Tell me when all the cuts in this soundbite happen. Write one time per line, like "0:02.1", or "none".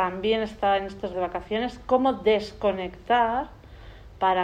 0:01.1